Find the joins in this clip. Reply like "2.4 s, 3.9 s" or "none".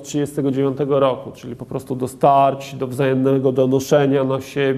none